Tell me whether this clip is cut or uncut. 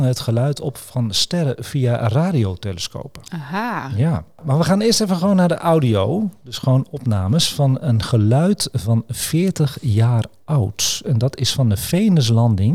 uncut